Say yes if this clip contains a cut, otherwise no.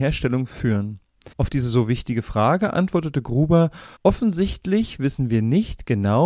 yes